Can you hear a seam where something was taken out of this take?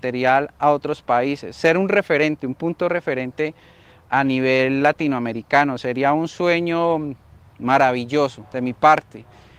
no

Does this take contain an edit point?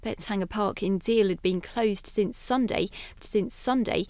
yes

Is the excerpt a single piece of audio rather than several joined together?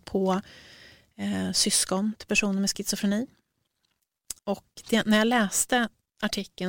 no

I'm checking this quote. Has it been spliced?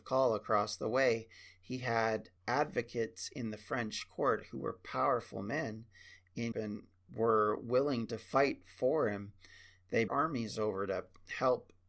yes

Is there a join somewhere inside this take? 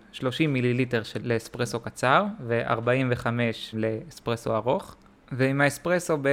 yes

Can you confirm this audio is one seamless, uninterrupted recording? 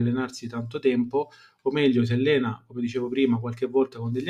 yes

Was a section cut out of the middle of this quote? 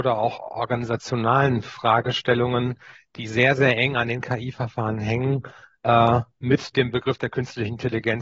no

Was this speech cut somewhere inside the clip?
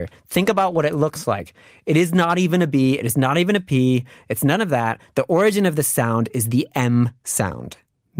no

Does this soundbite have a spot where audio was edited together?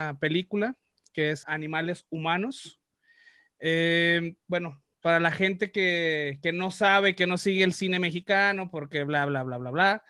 yes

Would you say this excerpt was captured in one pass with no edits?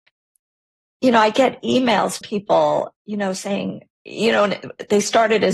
no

